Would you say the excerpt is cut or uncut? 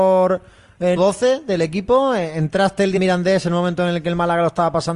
cut